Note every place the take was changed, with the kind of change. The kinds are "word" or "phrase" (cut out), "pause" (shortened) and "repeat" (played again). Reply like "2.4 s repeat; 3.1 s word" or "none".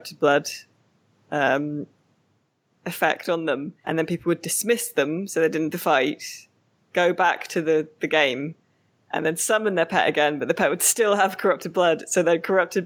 3.8 s word; 5.7 s phrase; 9.1 s word